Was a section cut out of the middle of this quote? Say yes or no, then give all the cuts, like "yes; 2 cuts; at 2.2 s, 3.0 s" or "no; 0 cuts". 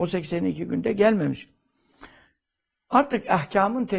no; 0 cuts